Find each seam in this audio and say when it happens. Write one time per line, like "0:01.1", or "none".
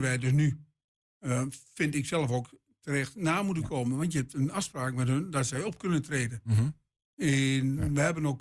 none